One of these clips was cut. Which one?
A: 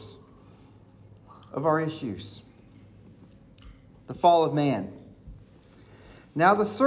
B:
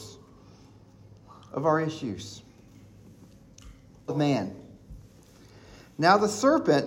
B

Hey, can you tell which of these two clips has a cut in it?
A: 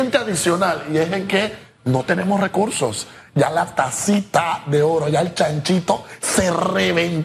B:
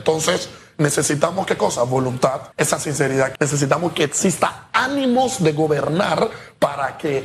B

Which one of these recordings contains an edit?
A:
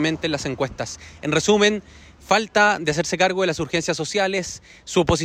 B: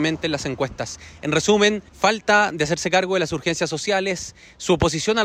B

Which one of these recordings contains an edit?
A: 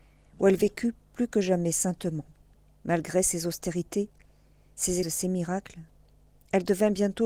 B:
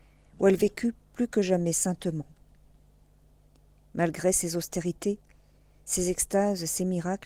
A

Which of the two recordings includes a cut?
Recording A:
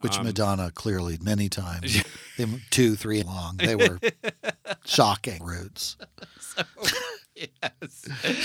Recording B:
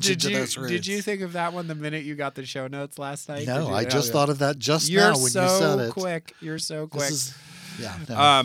A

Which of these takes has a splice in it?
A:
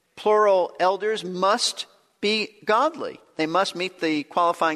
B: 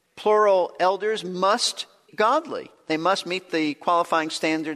B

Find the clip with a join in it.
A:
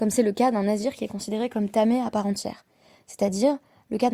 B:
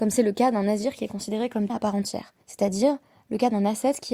B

